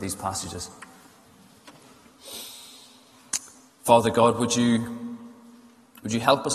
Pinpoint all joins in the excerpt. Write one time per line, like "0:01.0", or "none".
0:03.7